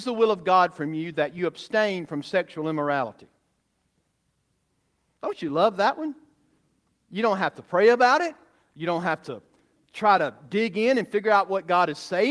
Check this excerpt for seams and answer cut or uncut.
uncut